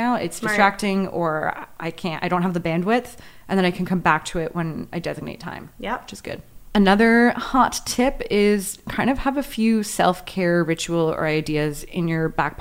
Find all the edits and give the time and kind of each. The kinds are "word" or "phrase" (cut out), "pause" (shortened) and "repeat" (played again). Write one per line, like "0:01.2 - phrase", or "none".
none